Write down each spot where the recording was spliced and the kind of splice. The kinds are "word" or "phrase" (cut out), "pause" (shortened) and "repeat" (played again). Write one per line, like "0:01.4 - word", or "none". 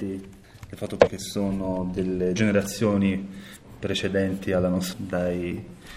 0:01.1 - word
0:02.4 - word
0:04.9 - word